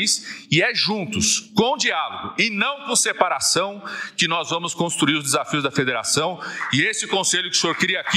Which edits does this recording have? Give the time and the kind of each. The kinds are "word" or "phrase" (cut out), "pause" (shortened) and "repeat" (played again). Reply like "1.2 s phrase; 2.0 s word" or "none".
none